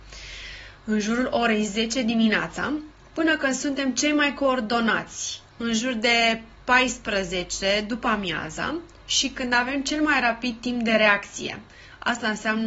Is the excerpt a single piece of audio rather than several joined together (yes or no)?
no